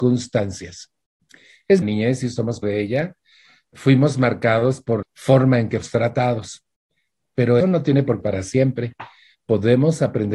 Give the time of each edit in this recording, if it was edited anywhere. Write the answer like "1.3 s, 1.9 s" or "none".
1.8 s, 2.6 s, 3.7 s, 5.0 s, 5.8 s, 7.6 s, 8.2 s